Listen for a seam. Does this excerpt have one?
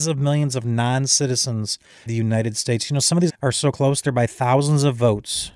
yes; 2 cuts; at 2.1 s, 3.3 s

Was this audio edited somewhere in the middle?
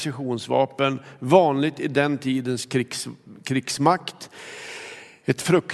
no; 0 cuts

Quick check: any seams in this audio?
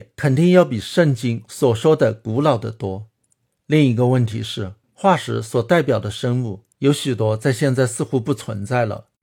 yes; 3 cuts; at 3.5 s, 4.8 s, 6.7 s

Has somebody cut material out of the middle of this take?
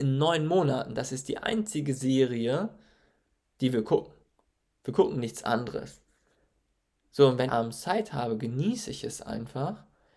yes; 1 cut; at 7.5 s

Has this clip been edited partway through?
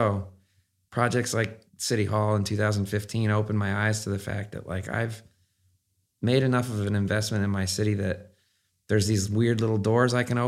yes; 1 cut; at 1.7 s

